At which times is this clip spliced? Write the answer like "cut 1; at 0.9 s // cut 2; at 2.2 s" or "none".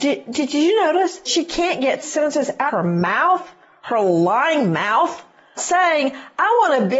cut 1; at 1.3 s // cut 2; at 2.0 s // cut 3; at 2.7 s // cut 4; at 5.6 s